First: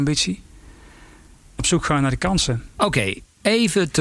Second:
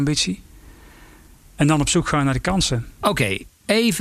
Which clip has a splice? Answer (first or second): first